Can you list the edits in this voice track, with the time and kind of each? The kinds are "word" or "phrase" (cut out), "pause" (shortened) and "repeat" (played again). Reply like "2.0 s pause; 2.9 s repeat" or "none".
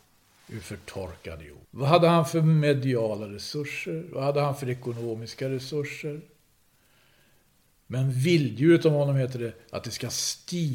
1.6 s pause